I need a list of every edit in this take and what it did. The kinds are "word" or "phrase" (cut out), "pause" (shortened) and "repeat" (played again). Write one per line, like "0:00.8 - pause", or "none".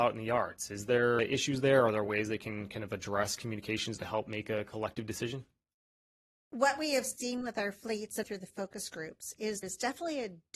0:01.2 - word
0:08.2 - word
0:09.6 - word